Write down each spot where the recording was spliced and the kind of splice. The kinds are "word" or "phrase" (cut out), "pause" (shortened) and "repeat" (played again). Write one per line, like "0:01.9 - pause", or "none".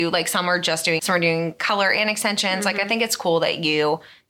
0:01.0 - word